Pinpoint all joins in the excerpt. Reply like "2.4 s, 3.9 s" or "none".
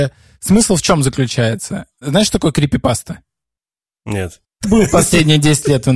4.6 s

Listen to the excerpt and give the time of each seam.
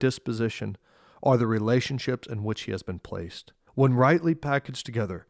3.7 s

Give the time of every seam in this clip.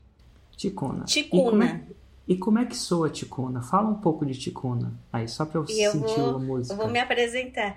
none

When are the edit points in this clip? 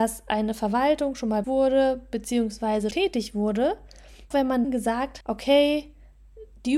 1.4 s, 2.9 s, 4.3 s, 4.6 s, 5.2 s

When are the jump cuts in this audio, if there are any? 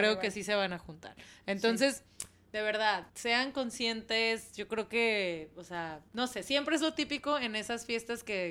3.1 s, 6.1 s

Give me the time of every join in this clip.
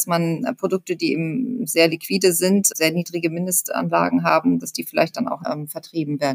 2.7 s, 5.4 s

